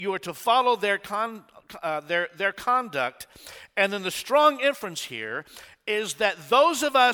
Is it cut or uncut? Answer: uncut